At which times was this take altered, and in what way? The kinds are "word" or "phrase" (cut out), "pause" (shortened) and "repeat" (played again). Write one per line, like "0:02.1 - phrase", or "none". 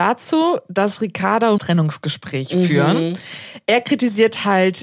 0:01.6 - phrase